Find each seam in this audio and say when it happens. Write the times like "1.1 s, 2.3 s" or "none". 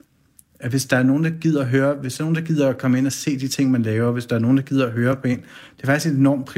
none